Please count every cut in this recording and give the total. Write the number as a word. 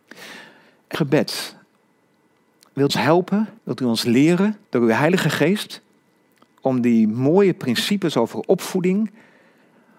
four